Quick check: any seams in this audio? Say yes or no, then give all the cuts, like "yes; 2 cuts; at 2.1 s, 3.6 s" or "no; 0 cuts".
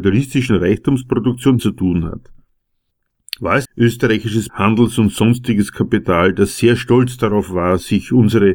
yes; 3 cuts; at 1.6 s, 3.6 s, 4.5 s